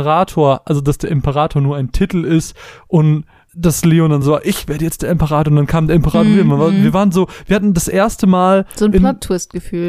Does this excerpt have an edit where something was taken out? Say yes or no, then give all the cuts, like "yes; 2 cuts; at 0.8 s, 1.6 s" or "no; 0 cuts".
no; 0 cuts